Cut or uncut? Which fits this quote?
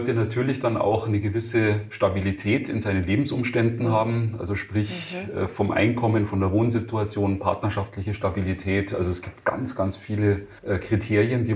cut